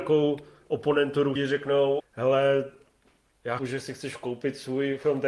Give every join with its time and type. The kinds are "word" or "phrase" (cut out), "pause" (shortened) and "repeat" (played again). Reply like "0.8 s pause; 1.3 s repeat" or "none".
1.4 s word; 2.0 s word; 3.6 s word

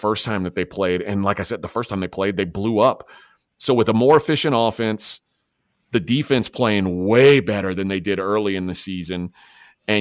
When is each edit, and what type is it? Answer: none

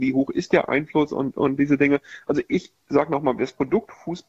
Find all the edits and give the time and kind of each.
none

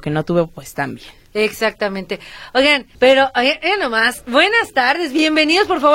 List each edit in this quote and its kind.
2.9 s pause

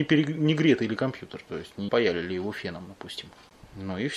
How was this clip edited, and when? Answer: 1.9 s word

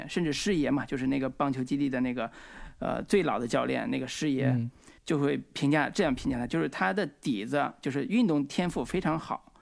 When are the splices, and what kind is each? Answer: 5.0 s pause

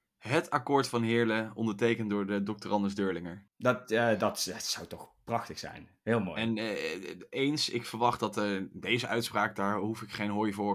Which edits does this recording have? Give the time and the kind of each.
none

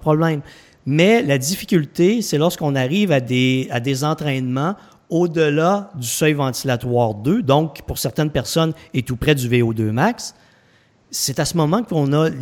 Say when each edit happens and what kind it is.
none

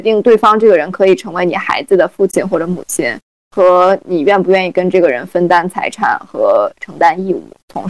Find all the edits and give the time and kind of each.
none

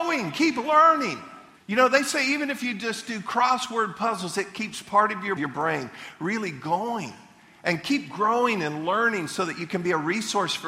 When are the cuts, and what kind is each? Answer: 1.6 s pause; 5.4 s phrase

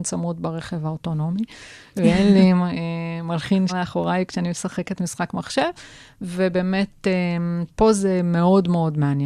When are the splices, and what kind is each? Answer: 3.7 s word

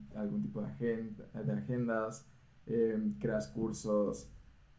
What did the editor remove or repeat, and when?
none

